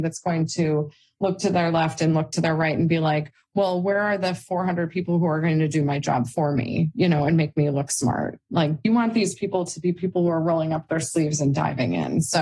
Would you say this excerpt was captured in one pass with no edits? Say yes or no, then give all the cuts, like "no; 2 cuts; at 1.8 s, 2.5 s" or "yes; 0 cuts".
yes; 0 cuts